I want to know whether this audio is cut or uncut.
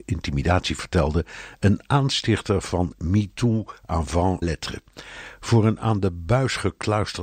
cut